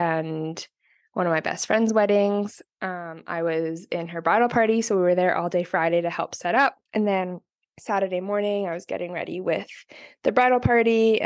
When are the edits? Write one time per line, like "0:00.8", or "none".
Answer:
0:06.9
0:07.6